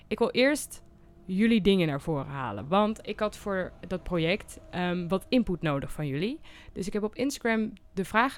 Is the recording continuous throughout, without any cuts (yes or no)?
yes